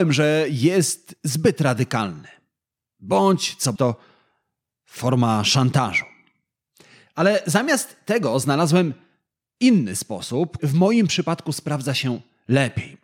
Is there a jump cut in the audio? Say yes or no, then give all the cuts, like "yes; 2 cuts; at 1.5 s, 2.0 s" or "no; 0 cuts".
yes; 2 cuts; at 3.8 s, 10.6 s